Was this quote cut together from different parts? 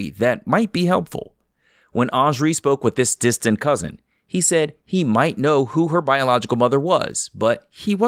no; 0 cuts

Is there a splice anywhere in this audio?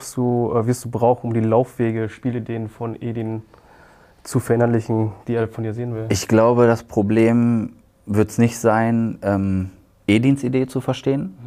no; 0 cuts

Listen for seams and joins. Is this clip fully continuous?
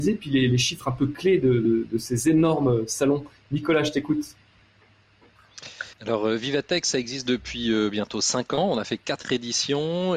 no; 1 cut; at 5.9 s

